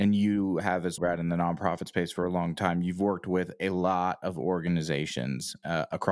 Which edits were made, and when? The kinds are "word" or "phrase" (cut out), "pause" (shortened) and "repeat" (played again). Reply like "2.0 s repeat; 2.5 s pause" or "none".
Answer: 1.0 s word

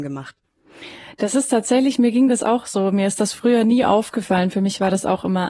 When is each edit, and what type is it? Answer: none

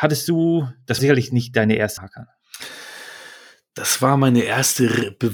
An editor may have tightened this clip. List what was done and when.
1.0 s word; 2.0 s word

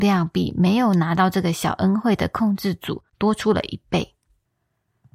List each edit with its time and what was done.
3.1 s pause

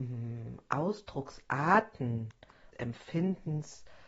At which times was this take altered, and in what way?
2.7 s word

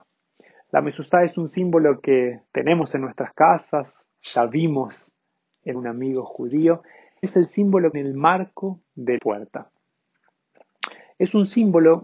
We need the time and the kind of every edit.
2.5 s pause; 4.1 s word; 5.7 s phrase; 7.2 s word; 7.9 s phrase; 9.2 s word

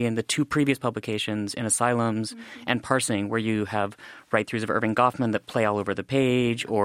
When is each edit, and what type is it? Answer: none

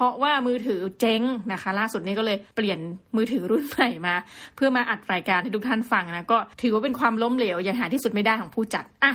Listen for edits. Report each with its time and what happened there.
2.5 s pause; 6.5 s pause

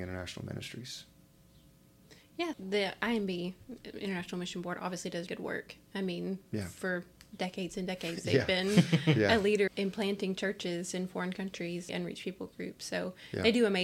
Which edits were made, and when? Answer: 2.5 s word; 5.3 s word; 9.7 s word; 11.9 s word

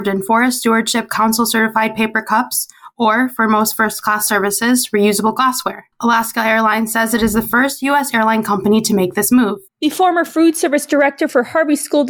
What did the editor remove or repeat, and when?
5.9 s pause; 9.7 s pause

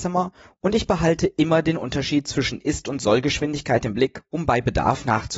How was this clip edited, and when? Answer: none

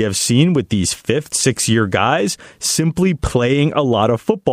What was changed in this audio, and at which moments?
1.3 s word

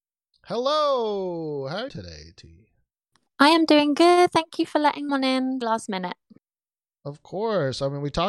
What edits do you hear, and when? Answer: 1.9 s phrase; 3.1 s pause; 5.1 s phrase; 5.6 s word

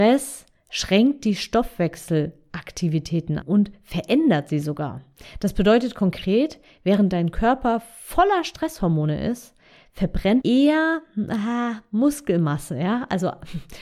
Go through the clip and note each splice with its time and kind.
3.4 s word; 10.4 s word

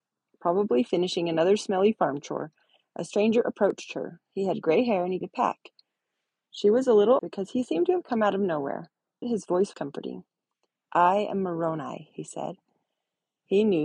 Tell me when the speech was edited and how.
5.2 s word; 7.2 s word; 9.2 s word; 9.7 s word

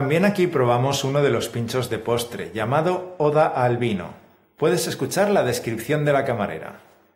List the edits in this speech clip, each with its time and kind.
none

